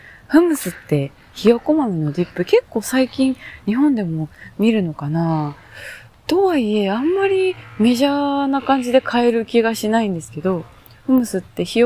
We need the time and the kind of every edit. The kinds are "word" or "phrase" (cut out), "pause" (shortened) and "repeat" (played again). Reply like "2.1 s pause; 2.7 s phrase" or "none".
none